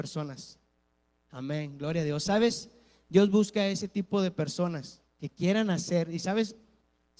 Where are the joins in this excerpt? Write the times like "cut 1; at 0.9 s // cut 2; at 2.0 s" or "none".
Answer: none